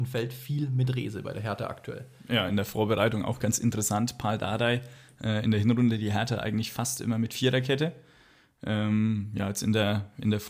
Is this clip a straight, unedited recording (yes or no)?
yes